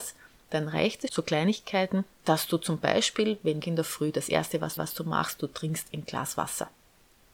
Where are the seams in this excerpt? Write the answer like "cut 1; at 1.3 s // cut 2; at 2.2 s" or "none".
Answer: cut 1; at 1.1 s // cut 2; at 2.1 s // cut 3; at 3.6 s // cut 4; at 4.8 s